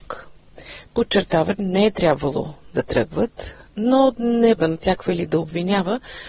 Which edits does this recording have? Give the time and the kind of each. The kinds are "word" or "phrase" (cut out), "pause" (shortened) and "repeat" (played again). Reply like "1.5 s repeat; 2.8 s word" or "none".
1.6 s word; 4.6 s word